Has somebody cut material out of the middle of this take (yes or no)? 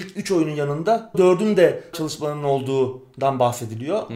yes